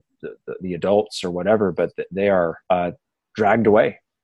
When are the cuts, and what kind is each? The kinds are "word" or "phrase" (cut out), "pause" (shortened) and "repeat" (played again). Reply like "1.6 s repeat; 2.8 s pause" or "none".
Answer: 2.6 s pause